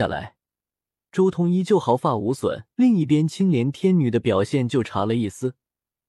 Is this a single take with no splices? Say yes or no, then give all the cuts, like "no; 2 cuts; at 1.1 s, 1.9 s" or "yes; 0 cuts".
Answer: no; 1 cut; at 2.7 s